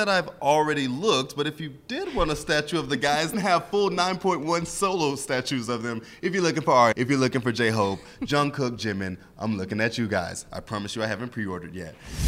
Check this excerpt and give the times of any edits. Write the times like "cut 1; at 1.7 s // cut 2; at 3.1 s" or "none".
cut 1; at 3.3 s // cut 2; at 6.9 s